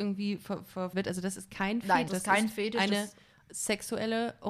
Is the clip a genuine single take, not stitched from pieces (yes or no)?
no